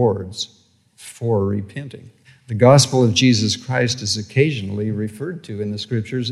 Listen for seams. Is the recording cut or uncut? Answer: cut